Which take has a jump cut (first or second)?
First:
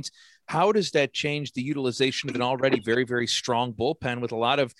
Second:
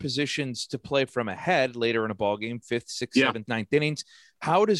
second